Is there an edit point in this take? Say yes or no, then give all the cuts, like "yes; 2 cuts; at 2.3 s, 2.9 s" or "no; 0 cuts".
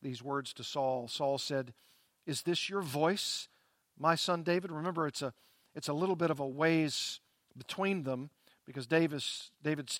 no; 0 cuts